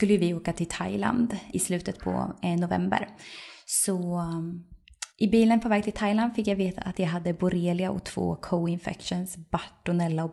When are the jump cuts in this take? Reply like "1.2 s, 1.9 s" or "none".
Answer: 1.5 s, 5.1 s